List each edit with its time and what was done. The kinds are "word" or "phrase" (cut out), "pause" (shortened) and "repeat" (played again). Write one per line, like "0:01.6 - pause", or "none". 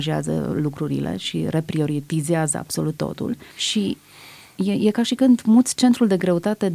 0:03.5 - pause